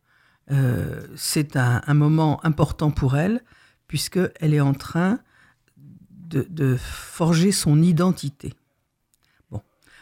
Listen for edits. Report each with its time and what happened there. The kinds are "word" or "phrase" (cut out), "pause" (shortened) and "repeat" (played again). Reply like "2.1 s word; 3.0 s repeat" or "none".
none